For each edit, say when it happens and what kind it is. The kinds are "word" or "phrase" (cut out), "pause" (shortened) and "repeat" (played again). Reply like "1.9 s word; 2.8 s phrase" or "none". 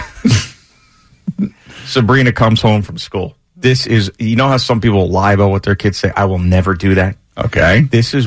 none

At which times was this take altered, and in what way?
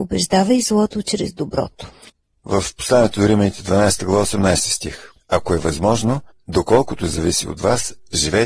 2.1 s pause; 5.2 s pause; 6.3 s pause

